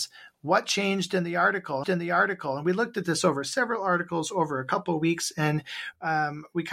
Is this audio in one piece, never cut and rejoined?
no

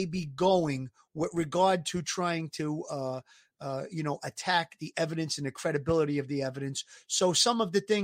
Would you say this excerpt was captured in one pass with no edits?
yes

